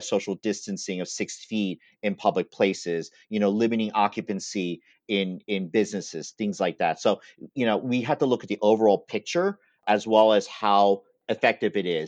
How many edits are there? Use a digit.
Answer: 0